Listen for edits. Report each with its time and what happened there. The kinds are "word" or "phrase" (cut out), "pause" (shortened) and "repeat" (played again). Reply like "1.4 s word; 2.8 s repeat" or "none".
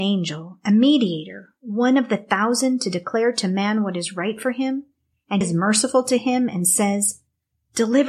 5.4 s word